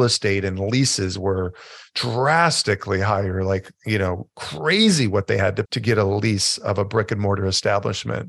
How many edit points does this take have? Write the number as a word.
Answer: one